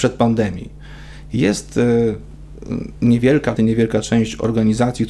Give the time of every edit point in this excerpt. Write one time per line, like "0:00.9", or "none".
0:03.6